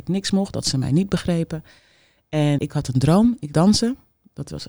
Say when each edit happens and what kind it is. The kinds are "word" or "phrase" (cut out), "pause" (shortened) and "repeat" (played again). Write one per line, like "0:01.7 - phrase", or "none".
0:02.6 - word
0:03.5 - word